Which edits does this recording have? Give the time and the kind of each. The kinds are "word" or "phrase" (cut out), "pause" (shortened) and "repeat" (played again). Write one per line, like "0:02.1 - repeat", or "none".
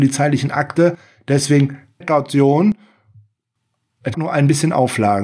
0:02.0 - word
0:04.1 - word